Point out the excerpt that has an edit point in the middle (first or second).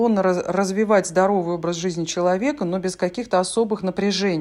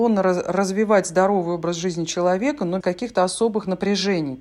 second